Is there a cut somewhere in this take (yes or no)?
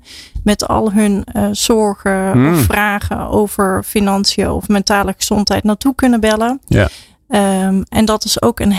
no